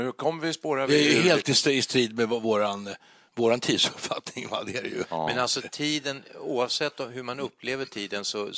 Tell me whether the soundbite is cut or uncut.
uncut